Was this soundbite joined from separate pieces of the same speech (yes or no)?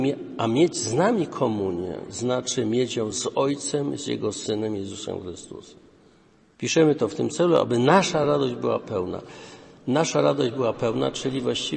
no